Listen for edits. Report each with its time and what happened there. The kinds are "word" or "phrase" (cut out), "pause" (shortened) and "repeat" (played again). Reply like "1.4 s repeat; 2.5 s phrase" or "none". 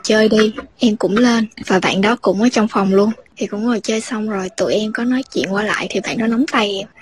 none